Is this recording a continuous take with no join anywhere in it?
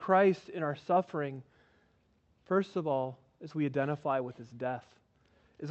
yes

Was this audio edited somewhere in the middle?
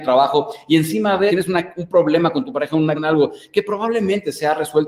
yes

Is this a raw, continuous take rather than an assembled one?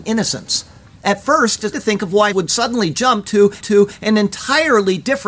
no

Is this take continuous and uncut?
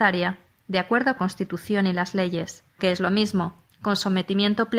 no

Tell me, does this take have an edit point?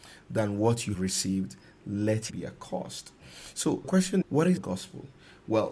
yes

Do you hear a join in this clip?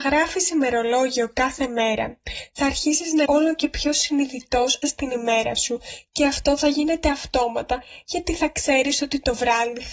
yes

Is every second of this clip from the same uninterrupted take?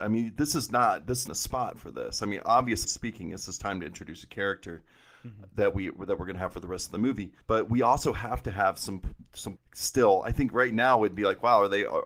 no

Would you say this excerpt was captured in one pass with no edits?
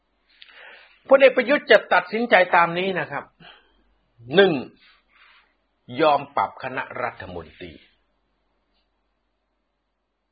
yes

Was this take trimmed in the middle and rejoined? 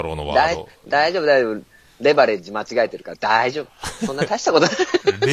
no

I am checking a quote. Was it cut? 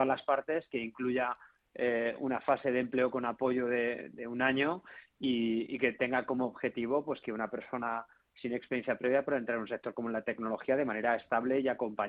no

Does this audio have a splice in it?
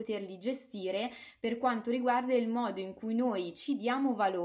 no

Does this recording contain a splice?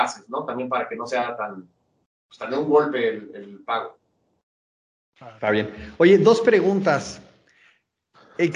no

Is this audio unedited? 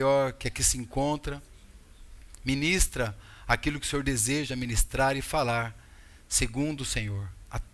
yes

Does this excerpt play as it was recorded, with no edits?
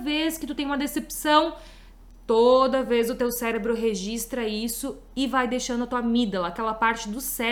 yes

